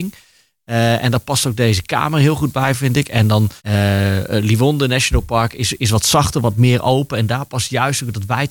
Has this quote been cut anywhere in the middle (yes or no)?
yes